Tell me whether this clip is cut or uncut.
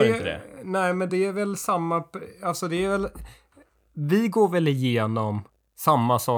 uncut